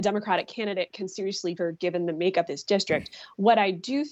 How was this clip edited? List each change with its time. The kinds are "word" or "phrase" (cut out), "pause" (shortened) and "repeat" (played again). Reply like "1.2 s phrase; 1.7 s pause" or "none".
1.6 s word; 2.5 s word